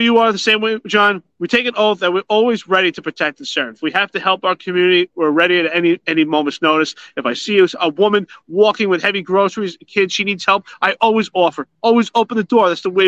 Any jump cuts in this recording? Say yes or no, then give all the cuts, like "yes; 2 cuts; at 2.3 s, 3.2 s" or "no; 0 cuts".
yes; 1 cut; at 1.3 s